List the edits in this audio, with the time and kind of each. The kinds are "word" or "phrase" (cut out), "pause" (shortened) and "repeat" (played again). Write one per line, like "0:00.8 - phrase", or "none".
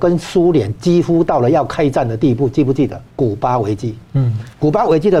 0:03.1 - pause